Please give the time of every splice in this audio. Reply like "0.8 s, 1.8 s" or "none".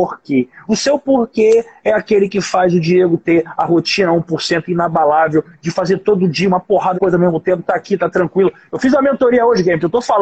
6.9 s